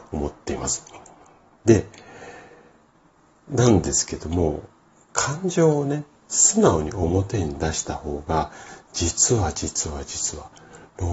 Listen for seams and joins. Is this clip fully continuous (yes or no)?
yes